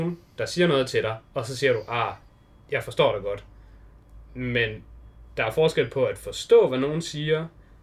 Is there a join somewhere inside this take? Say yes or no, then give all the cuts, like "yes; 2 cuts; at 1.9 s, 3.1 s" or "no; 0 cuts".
no; 0 cuts